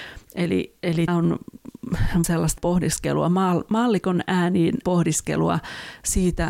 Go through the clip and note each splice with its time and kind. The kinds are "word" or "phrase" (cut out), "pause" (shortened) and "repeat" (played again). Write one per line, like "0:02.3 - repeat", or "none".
0:01.1 - word
0:02.2 - word
0:02.6 - word
0:04.8 - word

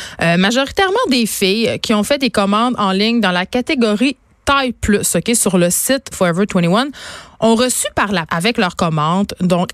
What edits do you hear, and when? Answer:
0:06.1 - word
0:08.3 - word

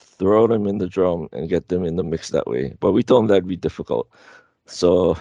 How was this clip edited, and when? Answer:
none

